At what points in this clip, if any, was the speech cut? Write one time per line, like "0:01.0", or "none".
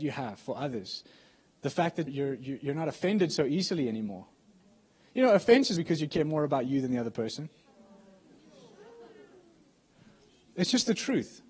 0:02.1
0:05.8